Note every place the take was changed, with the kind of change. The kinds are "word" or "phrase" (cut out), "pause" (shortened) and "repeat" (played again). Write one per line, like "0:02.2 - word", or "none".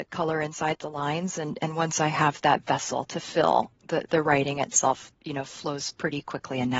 0:03.8 - word
0:05.1 - pause